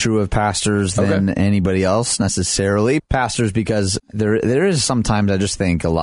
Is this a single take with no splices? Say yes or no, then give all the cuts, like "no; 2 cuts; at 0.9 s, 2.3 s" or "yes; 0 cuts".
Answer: no; 2 cuts; at 3.0 s, 4.0 s